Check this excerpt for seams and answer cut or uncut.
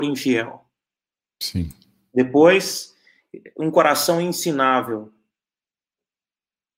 uncut